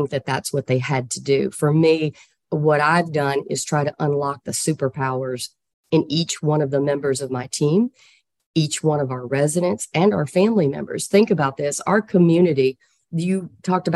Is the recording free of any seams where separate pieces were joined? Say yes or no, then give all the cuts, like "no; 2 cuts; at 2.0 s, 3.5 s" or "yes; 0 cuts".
yes; 0 cuts